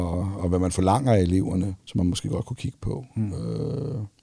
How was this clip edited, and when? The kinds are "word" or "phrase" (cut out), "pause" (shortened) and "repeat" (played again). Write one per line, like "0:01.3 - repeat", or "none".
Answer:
0:01.8 - pause